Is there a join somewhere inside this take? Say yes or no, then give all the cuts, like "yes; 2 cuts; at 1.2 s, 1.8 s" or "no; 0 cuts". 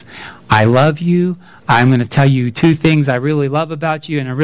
no; 0 cuts